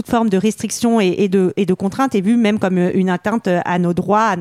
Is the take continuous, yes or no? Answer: yes